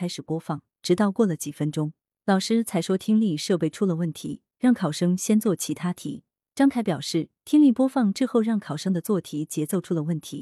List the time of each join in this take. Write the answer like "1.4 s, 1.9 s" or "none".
none